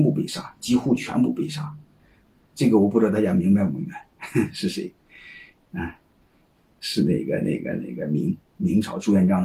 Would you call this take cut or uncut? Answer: uncut